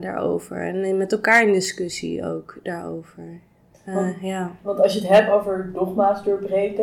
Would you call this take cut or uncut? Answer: uncut